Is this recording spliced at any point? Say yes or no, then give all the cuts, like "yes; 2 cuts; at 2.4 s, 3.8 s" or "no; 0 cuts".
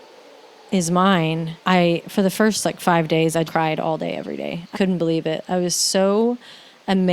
yes; 3 cuts; at 1.6 s, 3.5 s, 4.7 s